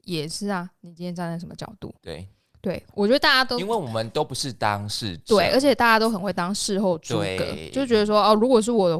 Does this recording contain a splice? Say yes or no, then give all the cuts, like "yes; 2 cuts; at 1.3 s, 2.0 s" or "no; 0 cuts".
yes; 1 cut; at 2.0 s